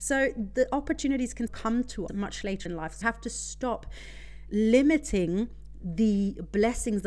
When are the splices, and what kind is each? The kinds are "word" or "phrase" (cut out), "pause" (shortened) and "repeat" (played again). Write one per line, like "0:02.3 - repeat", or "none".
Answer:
0:01.5 - word
0:02.1 - word
0:02.7 - word
0:03.0 - word